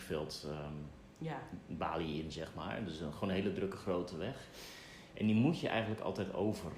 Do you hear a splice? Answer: no; 0 cuts

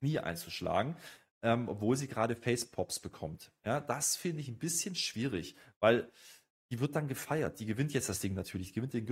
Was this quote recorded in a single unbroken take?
yes; 0 cuts

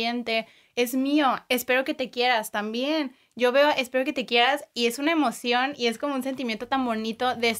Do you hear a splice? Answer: no; 0 cuts

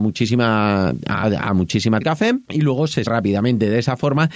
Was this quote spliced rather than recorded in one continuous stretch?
yes; 4 cuts; at 1.2 s, 2.0 s, 2.4 s, 3.1 s

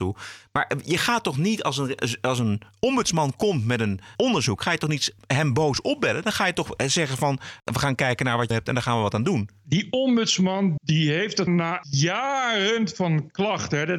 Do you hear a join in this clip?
yes; 5 cuts; at 4.1 s, 8.5 s, 10.8 s, 11.5 s, 11.8 s

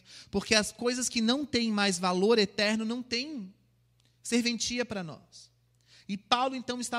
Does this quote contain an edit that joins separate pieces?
no; 0 cuts

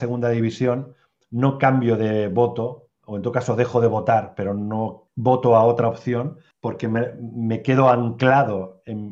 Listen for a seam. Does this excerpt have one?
no; 0 cuts

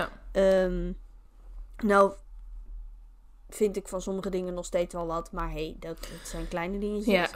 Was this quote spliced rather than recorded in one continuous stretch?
no; 0 cuts

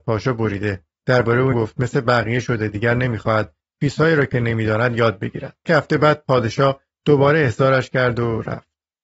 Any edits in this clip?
yes; 2 cuts; at 1.5 s, 5.7 s

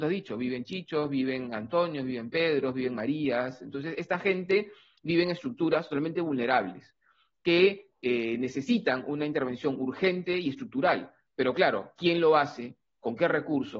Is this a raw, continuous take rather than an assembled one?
yes; 0 cuts

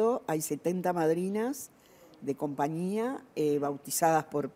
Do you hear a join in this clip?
no; 0 cuts

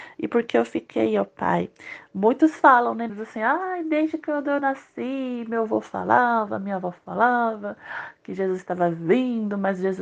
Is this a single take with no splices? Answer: no; 1 cut; at 3.1 s

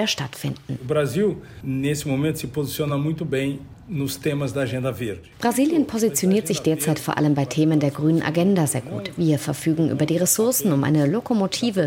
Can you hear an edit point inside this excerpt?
no; 0 cuts

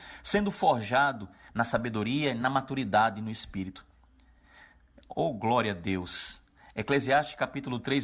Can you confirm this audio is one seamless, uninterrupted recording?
yes; 0 cuts

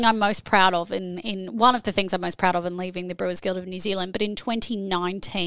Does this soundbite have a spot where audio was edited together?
no; 0 cuts

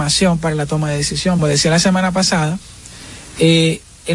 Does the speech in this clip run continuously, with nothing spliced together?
no; 1 cut; at 1.4 s

